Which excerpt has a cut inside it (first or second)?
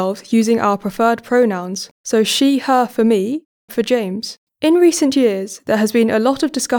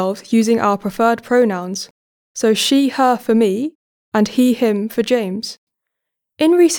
first